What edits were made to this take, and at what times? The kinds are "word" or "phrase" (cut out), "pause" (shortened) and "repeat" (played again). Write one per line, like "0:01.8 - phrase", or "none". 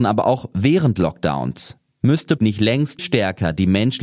0:01.0 - word
0:02.4 - word
0:03.0 - word